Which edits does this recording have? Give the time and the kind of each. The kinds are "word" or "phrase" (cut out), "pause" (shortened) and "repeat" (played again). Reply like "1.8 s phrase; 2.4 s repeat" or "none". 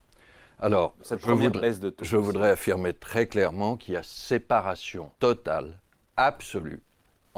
5.1 s pause